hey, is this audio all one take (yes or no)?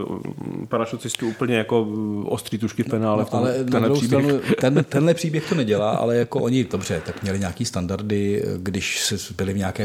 yes